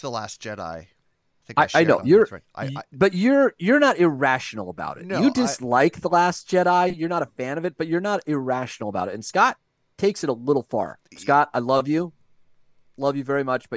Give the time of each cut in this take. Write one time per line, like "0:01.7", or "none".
none